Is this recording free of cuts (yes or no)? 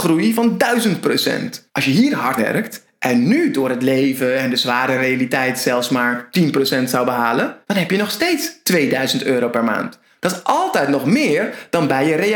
no